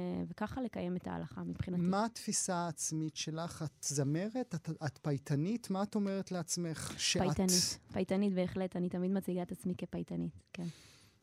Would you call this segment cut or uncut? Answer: uncut